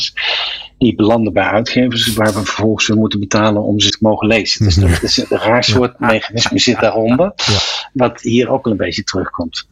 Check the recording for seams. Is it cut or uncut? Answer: cut